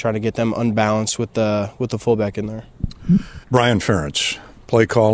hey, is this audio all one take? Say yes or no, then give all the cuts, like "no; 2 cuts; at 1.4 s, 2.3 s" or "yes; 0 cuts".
no; 1 cut; at 3.4 s